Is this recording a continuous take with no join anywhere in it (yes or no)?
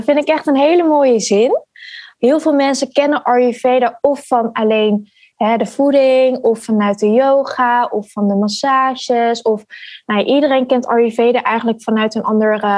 yes